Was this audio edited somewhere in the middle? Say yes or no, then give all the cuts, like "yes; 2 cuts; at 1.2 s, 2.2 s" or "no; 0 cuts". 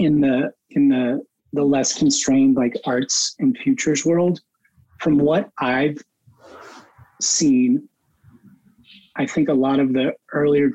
no; 0 cuts